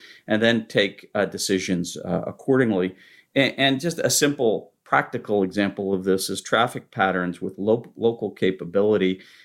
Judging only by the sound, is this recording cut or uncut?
uncut